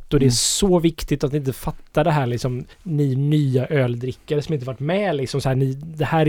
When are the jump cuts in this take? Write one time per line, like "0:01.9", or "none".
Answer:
0:02.7